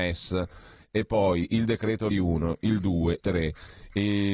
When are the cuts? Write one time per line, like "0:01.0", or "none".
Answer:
0:02.1
0:03.2

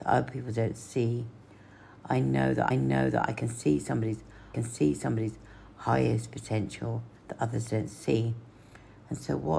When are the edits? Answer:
0:02.7
0:04.5
0:07.2

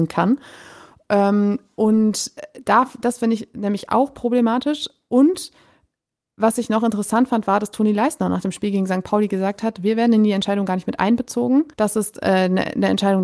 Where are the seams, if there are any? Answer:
0:11.7

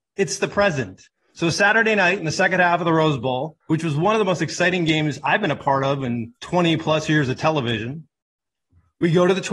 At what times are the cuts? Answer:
0:01.1
0:03.6
0:06.4

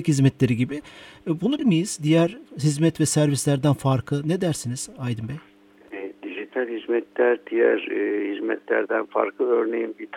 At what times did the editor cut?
0:01.6

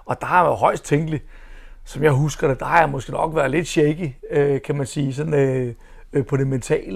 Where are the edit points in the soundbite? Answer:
none

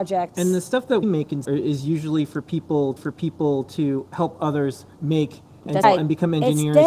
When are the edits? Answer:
0:01.0
0:01.4
0:03.0
0:04.9
0:05.8

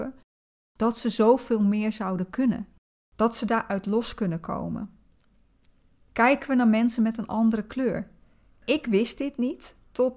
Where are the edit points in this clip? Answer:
none

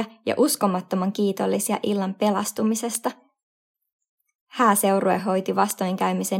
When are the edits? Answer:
none

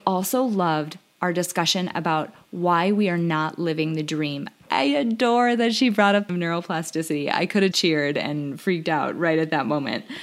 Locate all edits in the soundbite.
0:06.3
0:07.7

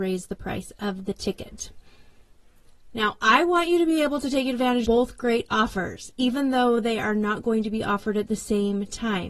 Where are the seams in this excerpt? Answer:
0:04.8

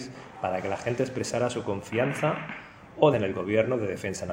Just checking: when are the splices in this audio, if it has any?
0:03.1

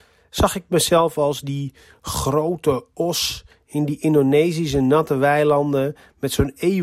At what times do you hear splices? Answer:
none

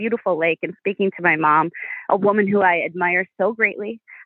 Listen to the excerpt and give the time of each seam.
none

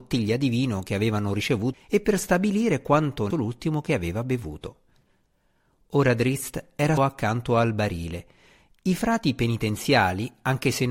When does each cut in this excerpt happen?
0:01.7
0:03.3
0:07.0

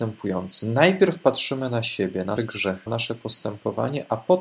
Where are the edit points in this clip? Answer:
0:02.4
0:02.9

